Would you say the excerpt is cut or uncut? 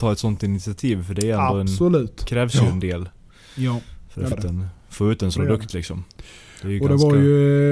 cut